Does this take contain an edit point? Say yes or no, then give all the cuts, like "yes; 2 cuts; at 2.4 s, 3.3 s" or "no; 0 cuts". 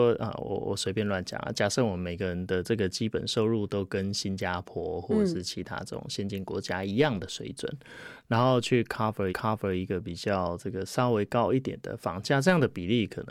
yes; 1 cut; at 9.3 s